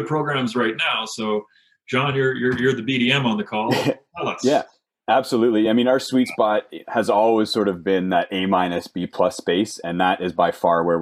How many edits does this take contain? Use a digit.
0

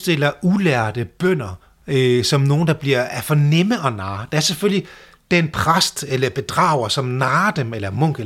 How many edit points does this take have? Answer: 0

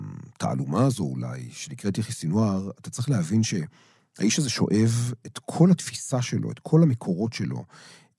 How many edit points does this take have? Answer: 0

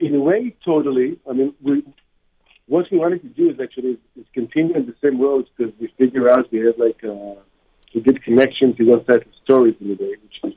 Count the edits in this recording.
0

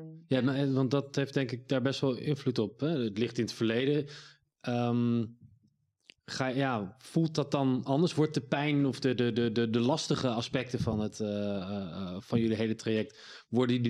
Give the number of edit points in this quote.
0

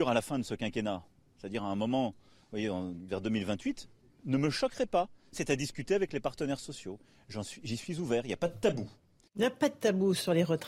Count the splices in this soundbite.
0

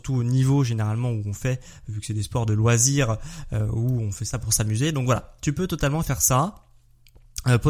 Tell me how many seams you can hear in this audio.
0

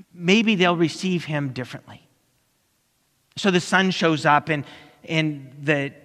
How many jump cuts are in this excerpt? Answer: 0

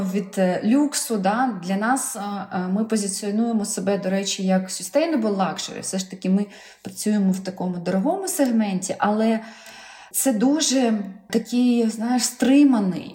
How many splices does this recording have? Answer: 0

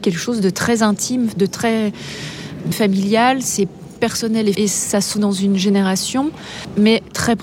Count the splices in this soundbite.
4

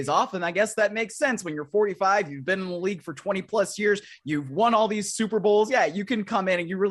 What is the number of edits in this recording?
0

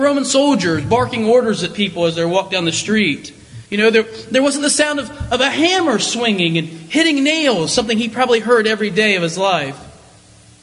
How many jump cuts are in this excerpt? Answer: 1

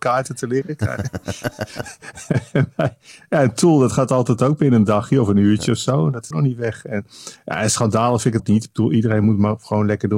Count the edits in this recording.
2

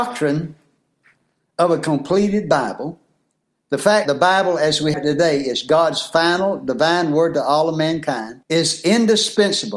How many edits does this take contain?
3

